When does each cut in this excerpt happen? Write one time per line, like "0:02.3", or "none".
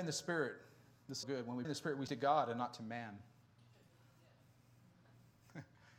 0:01.2
0:01.6
0:02.1